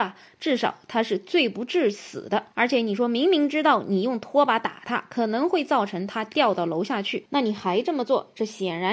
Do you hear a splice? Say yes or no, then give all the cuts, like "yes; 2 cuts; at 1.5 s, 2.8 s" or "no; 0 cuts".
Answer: yes; 1 cut; at 2.5 s